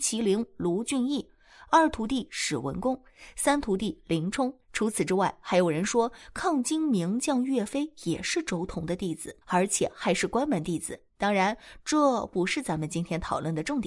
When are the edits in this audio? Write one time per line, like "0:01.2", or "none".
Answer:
0:04.6
0:09.4
0:11.1